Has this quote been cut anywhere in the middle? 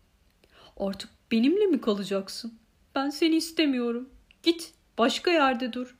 no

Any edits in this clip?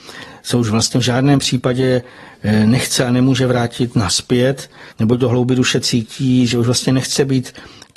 yes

